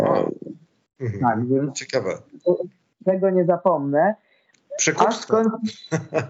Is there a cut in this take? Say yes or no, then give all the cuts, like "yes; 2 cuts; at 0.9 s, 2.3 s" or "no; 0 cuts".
no; 0 cuts